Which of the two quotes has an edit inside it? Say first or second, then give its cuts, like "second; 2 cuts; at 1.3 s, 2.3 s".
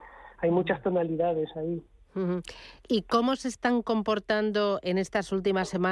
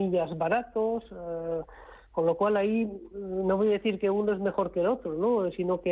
first; 1 cut; at 2.8 s